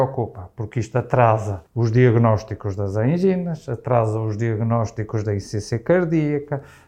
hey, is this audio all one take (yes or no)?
no